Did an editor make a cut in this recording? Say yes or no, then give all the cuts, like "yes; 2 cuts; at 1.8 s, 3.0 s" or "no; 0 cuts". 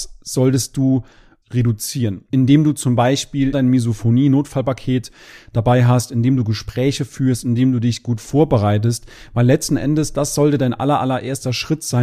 yes; 2 cuts; at 1.4 s, 3.5 s